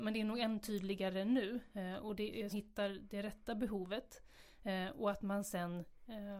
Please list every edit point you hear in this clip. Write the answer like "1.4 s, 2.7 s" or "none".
2.5 s